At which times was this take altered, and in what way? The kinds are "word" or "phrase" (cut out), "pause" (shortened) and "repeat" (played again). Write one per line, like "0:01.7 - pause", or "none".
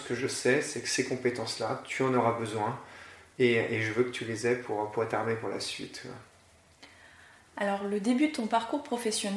none